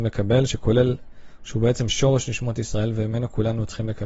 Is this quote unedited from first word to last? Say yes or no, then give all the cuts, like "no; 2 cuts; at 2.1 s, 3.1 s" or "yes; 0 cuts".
yes; 0 cuts